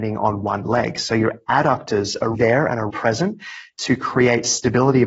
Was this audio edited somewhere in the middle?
yes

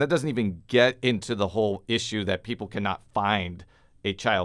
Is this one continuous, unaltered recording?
yes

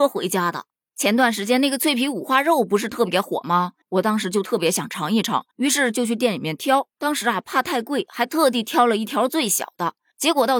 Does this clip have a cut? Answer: yes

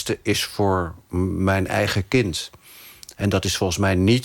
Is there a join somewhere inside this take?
no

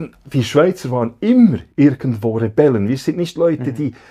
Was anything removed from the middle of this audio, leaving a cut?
no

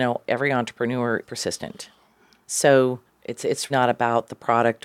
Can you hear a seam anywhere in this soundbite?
yes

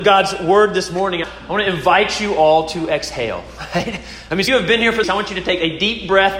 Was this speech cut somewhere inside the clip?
yes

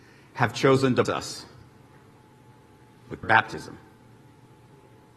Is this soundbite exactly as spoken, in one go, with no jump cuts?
no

